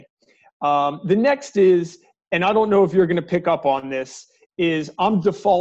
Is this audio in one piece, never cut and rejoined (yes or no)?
yes